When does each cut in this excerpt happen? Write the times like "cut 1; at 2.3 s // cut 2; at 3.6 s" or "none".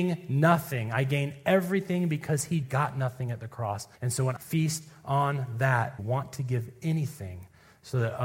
cut 1; at 2.6 s // cut 2; at 4.0 s // cut 3; at 4.4 s // cut 4; at 6.0 s